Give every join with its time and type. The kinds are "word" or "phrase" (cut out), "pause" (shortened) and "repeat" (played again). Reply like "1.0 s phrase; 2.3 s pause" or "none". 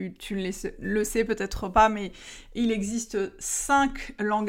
none